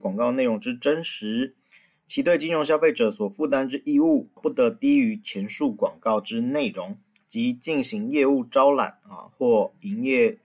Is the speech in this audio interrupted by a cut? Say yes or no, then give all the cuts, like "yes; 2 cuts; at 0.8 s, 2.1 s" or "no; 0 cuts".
yes; 1 cut; at 4.4 s